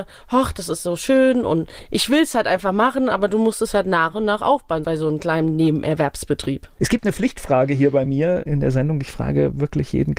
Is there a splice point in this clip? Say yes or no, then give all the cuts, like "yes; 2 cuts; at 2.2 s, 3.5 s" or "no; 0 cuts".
no; 0 cuts